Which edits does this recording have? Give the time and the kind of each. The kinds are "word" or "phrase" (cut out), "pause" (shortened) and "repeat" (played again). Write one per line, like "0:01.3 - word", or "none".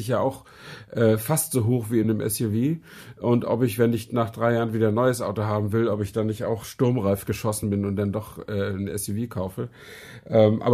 none

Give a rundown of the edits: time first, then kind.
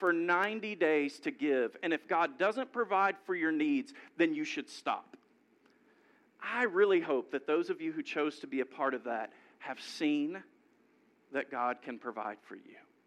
none

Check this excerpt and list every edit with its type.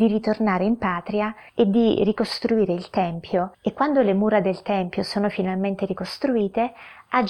0:01.5 - pause
0:03.5 - pause

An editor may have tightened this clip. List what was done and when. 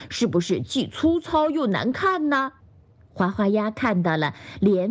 0:02.6 - pause

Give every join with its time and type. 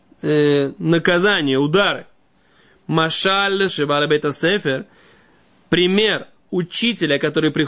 0:03.7 - word
0:06.5 - word

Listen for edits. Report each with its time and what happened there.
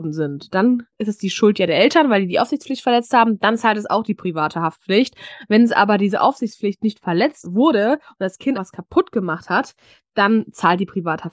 0:00.9 - pause
0:07.4 - word
0:08.5 - word

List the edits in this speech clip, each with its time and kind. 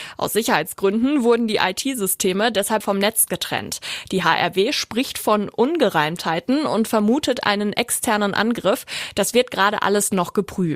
0:02.8 - word

